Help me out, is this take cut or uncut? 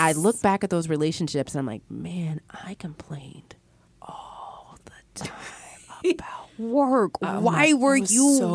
cut